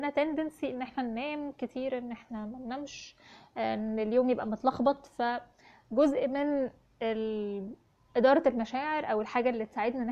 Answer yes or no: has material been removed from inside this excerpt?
no